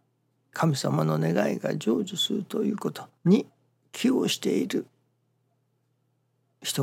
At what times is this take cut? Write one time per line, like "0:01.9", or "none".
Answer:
0:03.2